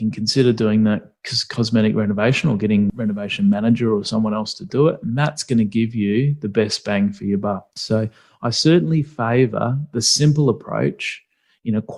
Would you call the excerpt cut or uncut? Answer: uncut